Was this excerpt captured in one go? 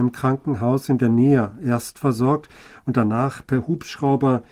yes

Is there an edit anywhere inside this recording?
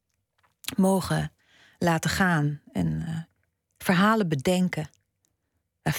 no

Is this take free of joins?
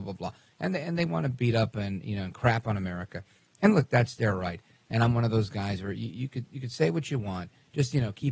yes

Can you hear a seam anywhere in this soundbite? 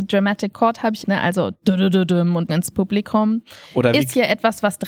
yes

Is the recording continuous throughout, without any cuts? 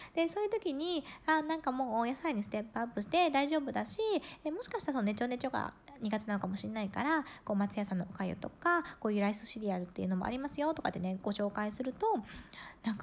yes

